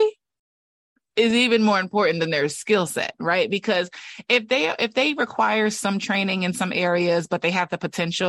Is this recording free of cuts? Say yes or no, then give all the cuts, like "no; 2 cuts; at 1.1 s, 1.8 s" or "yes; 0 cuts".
yes; 0 cuts